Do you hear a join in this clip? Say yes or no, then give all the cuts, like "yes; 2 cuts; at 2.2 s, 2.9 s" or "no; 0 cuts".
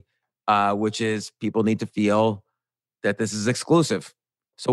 no; 0 cuts